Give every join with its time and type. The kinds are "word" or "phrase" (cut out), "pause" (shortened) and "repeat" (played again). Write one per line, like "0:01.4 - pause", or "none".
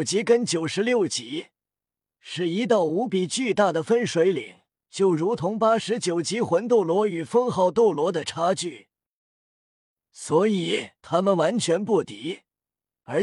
0:04.7 - pause
0:11.0 - pause

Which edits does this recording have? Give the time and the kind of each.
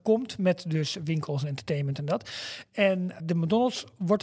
0:03.2 - word

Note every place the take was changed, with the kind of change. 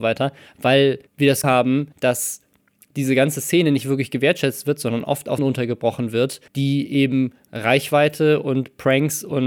0:01.1 - pause
0:01.4 - word
0:01.9 - pause
0:05.4 - word
0:06.5 - pause

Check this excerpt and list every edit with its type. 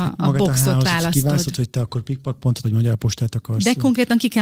0:02.6 - word

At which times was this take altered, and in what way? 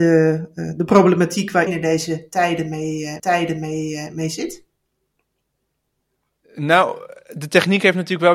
0:01.7 - word
0:03.2 - repeat

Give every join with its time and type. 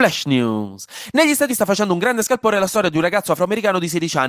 0:01.5 - word

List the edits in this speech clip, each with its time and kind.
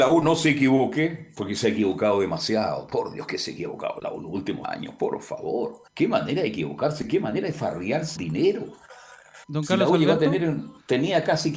0:04.6 - word
0:05.9 - pause
0:08.2 - word
0:09.4 - pause

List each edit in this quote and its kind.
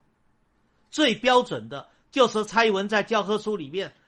none

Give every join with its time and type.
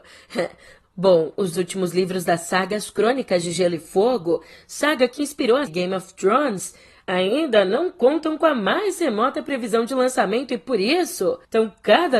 0:01.5 - word
0:05.7 - word

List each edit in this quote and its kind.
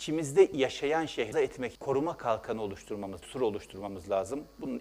0:01.3 - word
0:01.8 - word
0:03.2 - word

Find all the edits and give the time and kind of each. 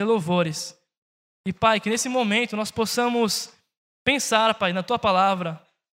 none

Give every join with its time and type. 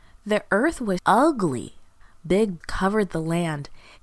0:01.0 - word
0:02.6 - word

